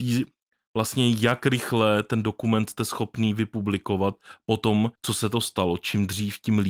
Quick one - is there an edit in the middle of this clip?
yes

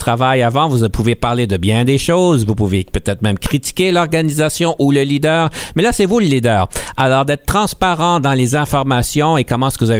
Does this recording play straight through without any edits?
yes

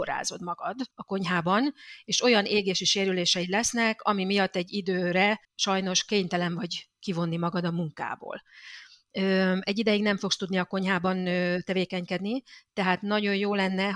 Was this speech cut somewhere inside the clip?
yes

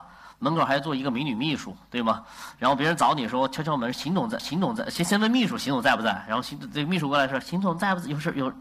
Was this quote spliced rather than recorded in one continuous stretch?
yes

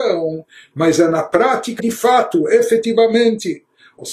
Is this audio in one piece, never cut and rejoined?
no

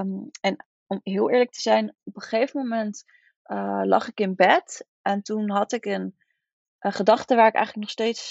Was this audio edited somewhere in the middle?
no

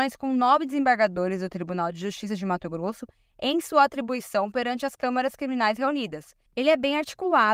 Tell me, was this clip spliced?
no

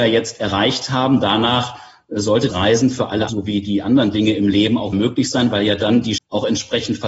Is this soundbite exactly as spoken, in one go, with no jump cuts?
no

